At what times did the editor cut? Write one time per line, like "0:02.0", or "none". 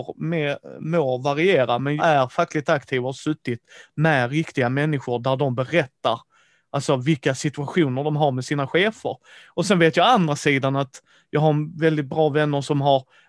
0:02.0

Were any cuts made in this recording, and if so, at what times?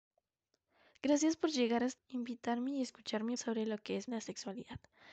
0:02.0
0:03.4
0:04.1

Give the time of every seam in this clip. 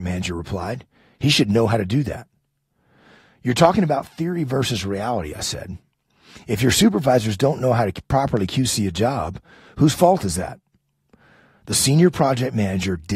none

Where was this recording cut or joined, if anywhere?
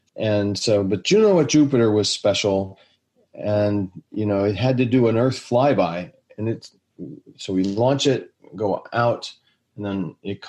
none

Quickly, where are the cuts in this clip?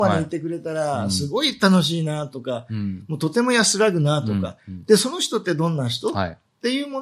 none

